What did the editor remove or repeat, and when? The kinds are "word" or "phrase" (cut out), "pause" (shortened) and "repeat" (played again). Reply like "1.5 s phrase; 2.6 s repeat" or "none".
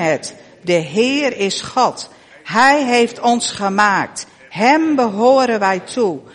none

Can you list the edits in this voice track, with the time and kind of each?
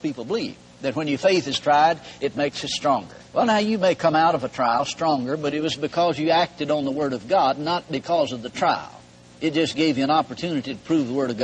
3.3 s pause; 9.1 s pause

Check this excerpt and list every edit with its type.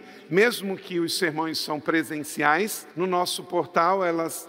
2.9 s pause

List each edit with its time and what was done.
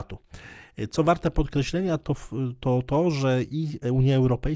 none

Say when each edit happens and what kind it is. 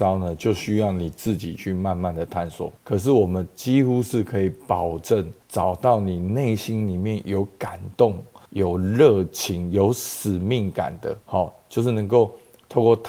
2.8 s pause; 5.4 s pause; 8.5 s pause; 11.2 s pause

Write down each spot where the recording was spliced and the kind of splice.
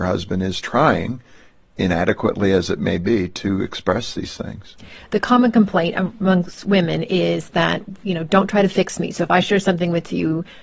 none

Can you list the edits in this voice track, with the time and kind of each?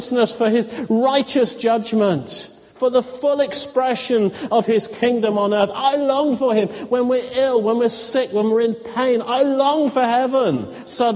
none

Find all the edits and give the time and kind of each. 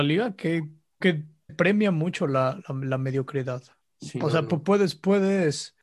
1.0 s word; 1.5 s word; 2.6 s word

